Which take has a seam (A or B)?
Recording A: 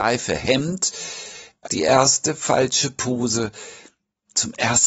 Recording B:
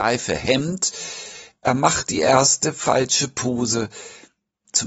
A